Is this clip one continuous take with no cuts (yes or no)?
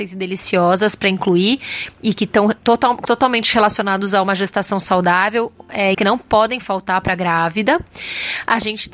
no